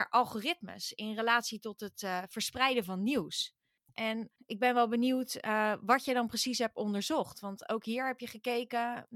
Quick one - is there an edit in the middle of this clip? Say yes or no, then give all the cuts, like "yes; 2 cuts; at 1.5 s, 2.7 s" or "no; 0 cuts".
no; 0 cuts